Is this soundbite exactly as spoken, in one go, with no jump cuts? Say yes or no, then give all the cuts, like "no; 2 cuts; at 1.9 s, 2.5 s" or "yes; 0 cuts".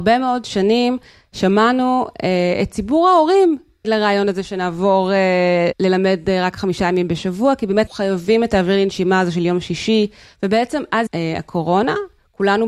no; 4 cuts; at 3.8 s, 5.7 s, 7.9 s, 11.1 s